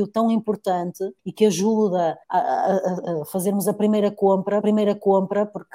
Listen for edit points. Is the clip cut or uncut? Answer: cut